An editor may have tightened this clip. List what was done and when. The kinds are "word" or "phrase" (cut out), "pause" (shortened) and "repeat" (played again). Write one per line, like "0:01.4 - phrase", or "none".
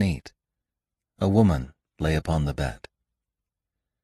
none